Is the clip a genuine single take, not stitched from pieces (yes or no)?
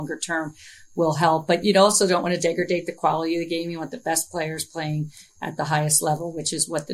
yes